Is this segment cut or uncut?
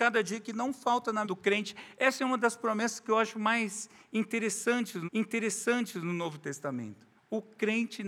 cut